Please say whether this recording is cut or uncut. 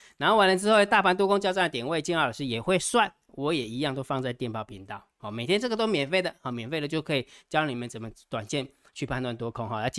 uncut